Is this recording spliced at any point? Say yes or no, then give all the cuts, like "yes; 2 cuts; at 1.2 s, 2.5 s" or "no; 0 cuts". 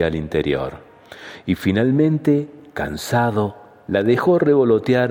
no; 0 cuts